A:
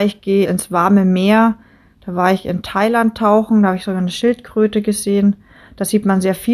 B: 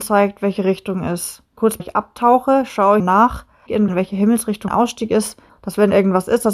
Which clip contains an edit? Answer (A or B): B